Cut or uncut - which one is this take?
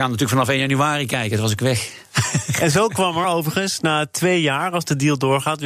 uncut